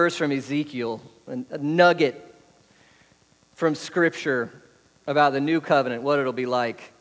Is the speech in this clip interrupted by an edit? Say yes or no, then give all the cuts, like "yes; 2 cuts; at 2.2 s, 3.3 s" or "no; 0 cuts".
no; 0 cuts